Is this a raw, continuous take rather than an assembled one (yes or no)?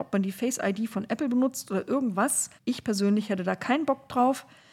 no